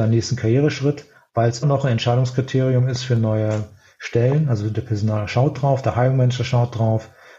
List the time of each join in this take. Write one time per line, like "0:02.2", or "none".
0:01.6

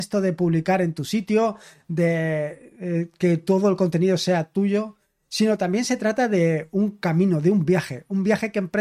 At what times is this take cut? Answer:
none

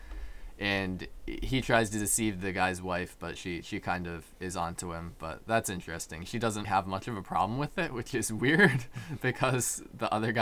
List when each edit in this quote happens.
0:06.6

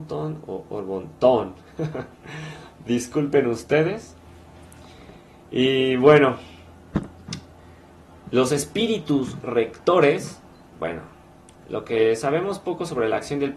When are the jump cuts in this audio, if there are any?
none

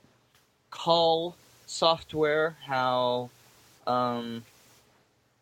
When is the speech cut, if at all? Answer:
none

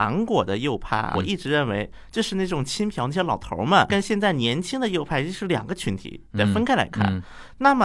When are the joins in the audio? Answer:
0:01.1
0:03.9

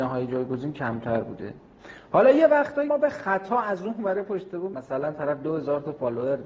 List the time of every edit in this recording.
0:02.9
0:04.7

